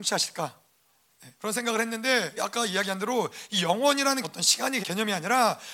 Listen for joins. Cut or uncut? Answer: cut